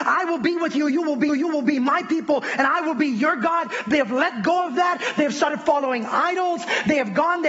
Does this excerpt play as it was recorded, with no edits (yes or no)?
no